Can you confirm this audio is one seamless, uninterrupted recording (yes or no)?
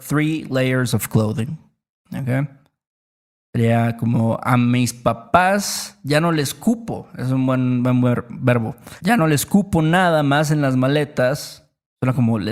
yes